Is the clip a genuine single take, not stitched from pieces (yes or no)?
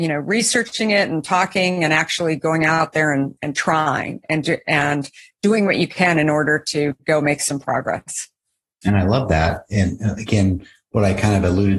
yes